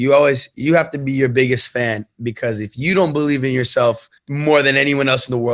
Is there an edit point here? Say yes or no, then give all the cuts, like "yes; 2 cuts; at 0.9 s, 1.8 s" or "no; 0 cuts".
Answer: yes; 1 cut; at 4.2 s